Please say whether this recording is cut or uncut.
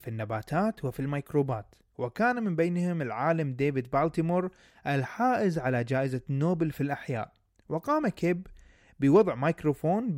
uncut